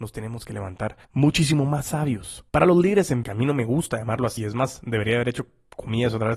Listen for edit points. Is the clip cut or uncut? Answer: cut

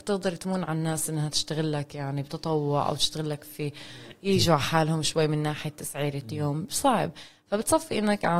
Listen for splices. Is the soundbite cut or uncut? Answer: uncut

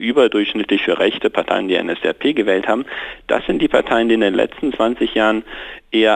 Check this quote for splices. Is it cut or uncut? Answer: uncut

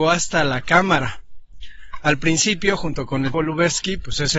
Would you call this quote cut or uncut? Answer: cut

